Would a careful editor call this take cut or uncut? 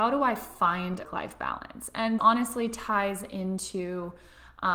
cut